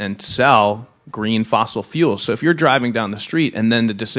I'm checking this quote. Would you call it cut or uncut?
uncut